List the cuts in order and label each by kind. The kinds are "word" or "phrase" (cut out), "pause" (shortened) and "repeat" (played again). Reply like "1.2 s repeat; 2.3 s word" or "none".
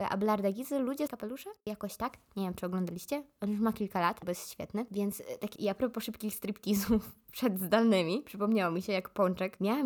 1.1 s word; 1.6 s pause; 4.2 s phrase; 5.6 s phrase